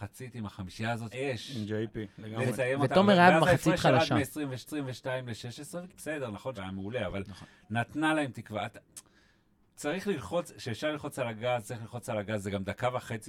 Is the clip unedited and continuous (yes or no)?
no